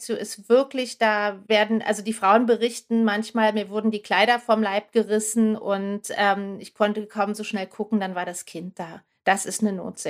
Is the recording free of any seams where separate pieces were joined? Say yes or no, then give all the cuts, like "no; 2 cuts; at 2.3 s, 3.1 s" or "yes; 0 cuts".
no; 1 cut; at 1.5 s